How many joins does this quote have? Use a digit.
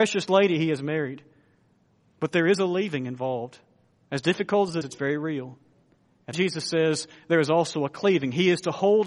2